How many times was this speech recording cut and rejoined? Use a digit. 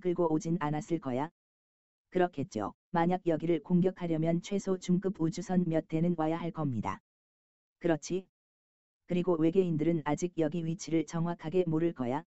1